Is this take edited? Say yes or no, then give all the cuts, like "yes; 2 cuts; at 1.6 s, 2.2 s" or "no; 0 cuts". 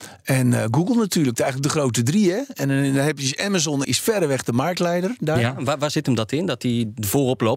yes; 1 cut; at 3.8 s